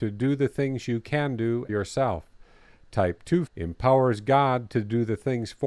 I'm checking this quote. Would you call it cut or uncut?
cut